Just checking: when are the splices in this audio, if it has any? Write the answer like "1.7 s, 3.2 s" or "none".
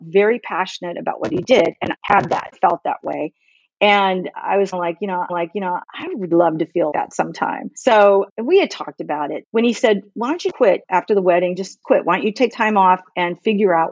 1.9 s, 2.5 s, 4.7 s, 5.3 s, 6.3 s, 6.9 s, 7.7 s, 10.5 s, 12.5 s